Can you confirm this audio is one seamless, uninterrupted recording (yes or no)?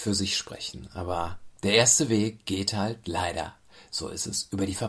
yes